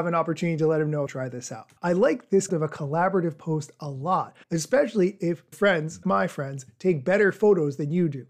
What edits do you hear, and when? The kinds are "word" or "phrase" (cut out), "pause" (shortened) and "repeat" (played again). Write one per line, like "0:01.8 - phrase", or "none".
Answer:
0:01.1 - phrase
0:01.8 - pause
0:02.5 - word
0:04.4 - pause
0:05.5 - word
0:06.0 - word

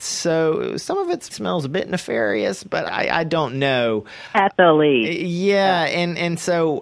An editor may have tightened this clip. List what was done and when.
0:01.3 - word
0:02.9 - word

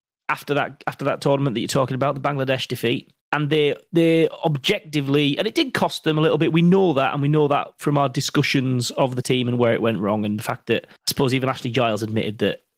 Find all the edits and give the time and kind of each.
0:03.2 - pause
0:09.2 - word
0:11.0 - pause

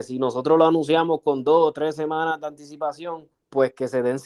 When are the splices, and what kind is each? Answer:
0:03.3 - pause

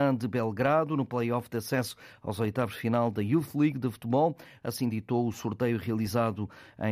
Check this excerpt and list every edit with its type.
none

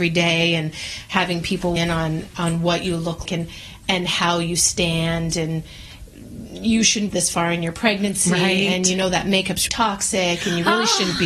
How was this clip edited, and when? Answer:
0:01.8 - word
0:03.2 - word
0:07.1 - phrase
0:09.7 - word

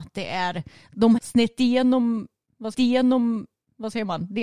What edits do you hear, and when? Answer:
0:01.2 - word
0:02.7 - repeat

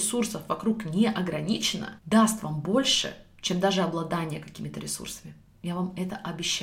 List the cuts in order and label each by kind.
0:02.0 - pause

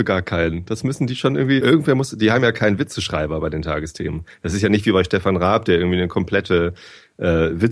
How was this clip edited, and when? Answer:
0:01.6 - word

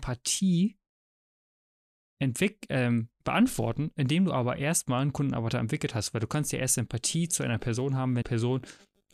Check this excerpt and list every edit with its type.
0:08.2 - word

